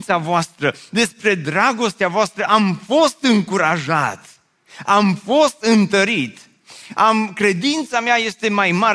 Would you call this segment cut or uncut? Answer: uncut